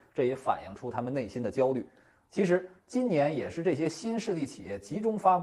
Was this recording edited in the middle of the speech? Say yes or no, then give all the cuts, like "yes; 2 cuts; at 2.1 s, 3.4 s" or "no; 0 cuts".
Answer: no; 0 cuts